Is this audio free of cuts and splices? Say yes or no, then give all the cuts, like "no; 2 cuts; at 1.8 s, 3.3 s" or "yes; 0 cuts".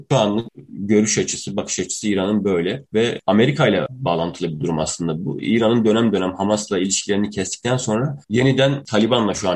no; 2 cuts; at 2.9 s, 8.2 s